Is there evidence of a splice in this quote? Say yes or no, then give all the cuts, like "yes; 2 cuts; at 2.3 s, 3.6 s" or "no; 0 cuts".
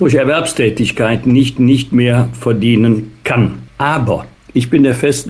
yes; 1 cut; at 1.6 s